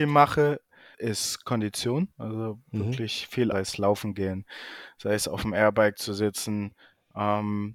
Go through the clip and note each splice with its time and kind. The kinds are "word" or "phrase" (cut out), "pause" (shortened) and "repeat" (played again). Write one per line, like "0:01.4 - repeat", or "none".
0:00.9 - word
0:02.1 - pause
0:03.5 - phrase